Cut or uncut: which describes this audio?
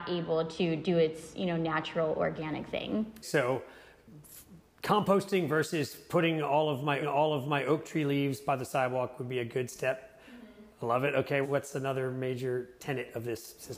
cut